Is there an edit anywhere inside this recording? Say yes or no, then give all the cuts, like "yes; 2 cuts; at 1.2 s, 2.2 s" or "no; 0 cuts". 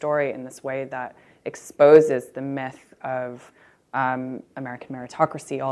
no; 0 cuts